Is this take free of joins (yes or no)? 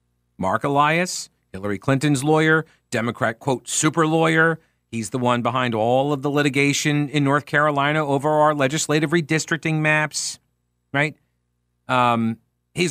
yes